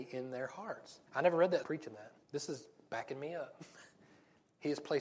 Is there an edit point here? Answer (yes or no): yes